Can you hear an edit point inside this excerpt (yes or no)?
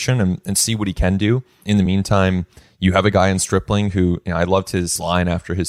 no